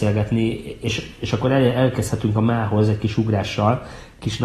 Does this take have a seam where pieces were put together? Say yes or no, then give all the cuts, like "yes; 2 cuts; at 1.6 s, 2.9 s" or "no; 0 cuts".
no; 0 cuts